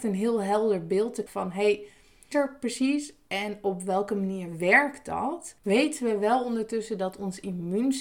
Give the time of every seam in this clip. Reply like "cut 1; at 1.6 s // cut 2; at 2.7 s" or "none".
cut 1; at 1.3 s // cut 2; at 2.3 s // cut 3; at 5.6 s